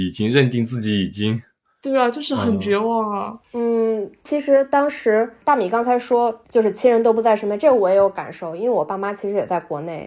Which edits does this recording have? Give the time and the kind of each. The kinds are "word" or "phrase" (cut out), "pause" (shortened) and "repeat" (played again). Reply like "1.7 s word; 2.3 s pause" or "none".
none

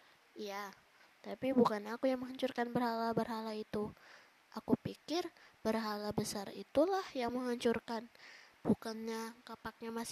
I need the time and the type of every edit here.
none

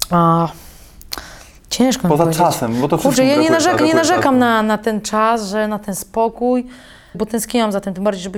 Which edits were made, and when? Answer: 3.8 s repeat; 7.1 s word

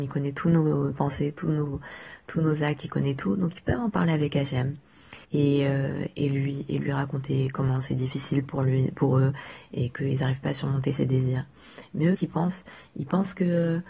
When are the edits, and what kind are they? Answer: 0.9 s word; 5.2 s pause; 12.2 s word

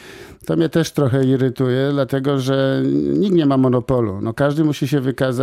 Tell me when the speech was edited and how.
none

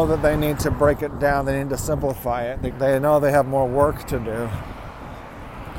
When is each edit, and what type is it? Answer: 2.7 s word

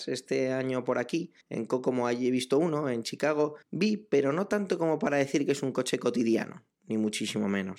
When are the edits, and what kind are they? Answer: 1.4 s pause; 3.6 s pause

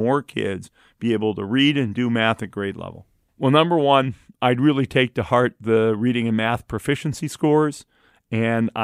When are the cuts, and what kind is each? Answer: none

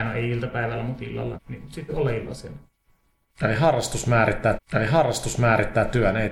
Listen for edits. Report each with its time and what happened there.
1.4 s word; 1.9 s word; 4.5 s repeat

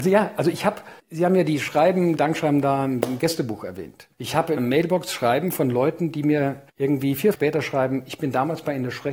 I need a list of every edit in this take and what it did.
1.0 s pause; 2.2 s word; 4.1 s pause; 4.6 s word; 6.7 s pause; 7.3 s phrase

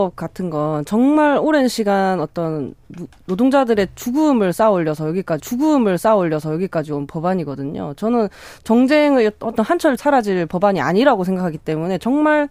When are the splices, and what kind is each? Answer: 5.4 s repeat; 10.0 s phrase

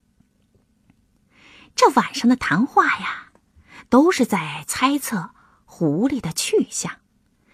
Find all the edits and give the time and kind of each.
none

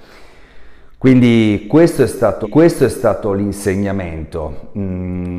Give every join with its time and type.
2.4 s repeat

